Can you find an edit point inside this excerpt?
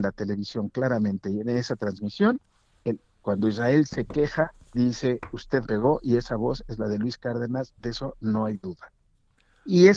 yes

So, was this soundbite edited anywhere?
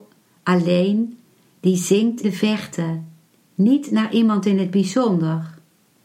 yes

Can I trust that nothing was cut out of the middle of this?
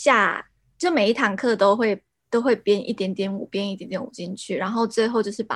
yes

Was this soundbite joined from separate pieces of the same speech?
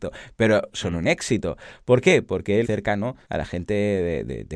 yes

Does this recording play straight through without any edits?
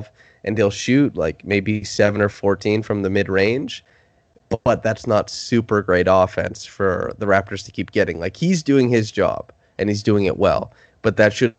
yes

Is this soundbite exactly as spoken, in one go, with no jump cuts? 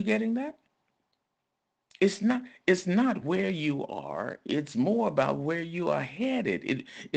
yes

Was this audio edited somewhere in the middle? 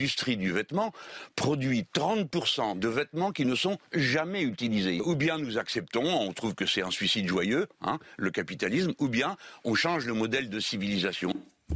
no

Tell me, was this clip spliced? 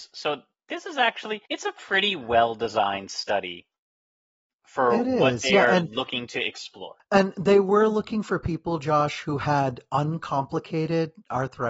yes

